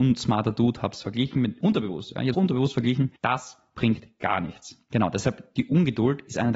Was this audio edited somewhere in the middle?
yes; 2 cuts; at 2.3 s, 3.2 s

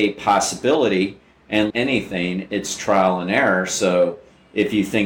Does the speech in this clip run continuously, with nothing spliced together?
no; 1 cut; at 1.7 s

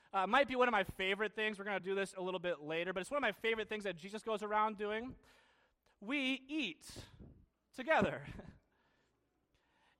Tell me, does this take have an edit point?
no; 0 cuts

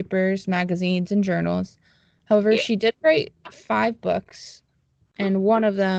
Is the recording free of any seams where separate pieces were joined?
yes; 0 cuts

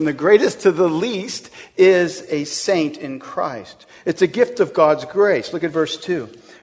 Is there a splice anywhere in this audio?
no; 0 cuts

